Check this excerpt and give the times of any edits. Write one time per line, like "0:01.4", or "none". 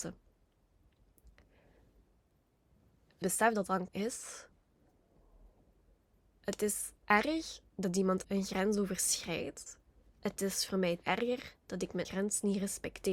0:03.2
0:03.9
0:07.0
0:08.2
0:10.0
0:11.0
0:12.0